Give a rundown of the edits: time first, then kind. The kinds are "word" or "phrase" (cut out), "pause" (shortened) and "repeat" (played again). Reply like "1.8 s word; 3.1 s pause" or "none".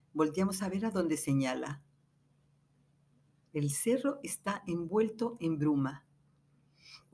none